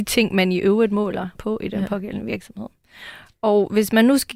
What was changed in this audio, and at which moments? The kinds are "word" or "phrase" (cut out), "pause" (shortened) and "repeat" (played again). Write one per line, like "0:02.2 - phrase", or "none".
0:01.4 - word